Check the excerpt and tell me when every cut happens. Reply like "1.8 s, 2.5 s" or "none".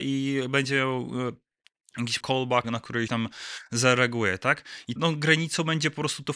2.2 s, 2.6 s, 3.1 s, 5.0 s